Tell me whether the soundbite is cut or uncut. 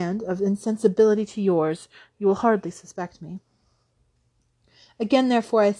uncut